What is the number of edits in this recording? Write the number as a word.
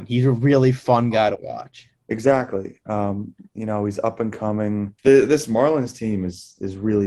two